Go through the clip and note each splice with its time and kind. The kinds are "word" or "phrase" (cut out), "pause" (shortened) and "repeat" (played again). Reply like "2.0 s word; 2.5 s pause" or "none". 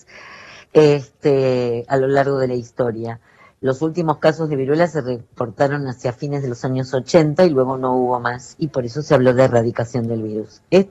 none